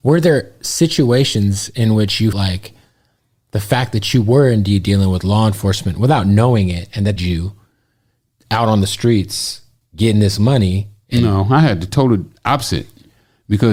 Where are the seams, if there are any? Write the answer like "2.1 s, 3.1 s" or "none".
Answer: 2.3 s, 7.2 s, 9.8 s, 11.9 s